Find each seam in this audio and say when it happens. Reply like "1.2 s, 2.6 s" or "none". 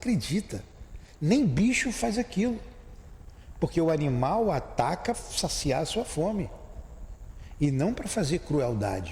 5.1 s

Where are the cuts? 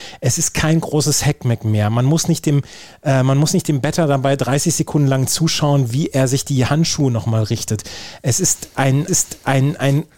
9.1 s

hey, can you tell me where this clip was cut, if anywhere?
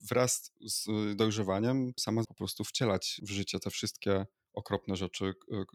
2.2 s

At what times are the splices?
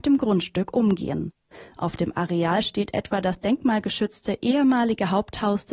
none

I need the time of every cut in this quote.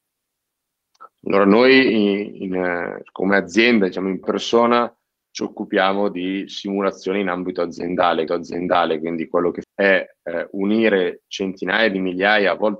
4.2 s, 8.3 s, 9.6 s

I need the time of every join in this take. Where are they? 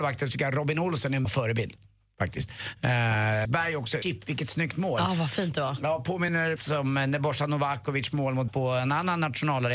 1.2 s, 3.4 s, 4.0 s, 6.6 s, 8.5 s

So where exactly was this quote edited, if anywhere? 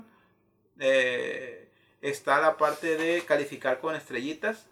none

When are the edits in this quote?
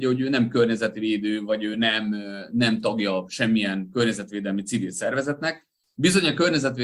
none

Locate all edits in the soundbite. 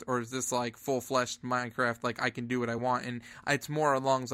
none

